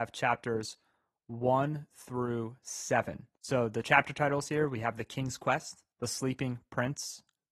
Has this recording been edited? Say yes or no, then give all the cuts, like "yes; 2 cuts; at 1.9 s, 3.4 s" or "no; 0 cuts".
yes; 2 cuts; at 3.3 s, 5.9 s